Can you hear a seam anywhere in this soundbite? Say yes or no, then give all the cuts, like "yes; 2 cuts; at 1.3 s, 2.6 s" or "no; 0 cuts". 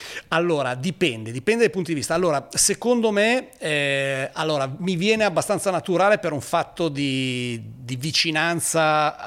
no; 0 cuts